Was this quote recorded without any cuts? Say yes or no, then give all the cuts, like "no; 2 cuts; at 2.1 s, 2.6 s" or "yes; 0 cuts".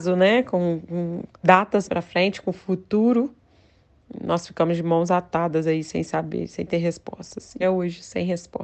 no; 3 cuts; at 1.4 s, 1.9 s, 7.6 s